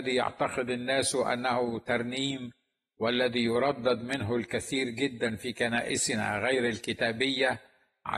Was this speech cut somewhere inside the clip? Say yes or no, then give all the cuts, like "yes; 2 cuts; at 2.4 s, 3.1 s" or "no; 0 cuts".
no; 0 cuts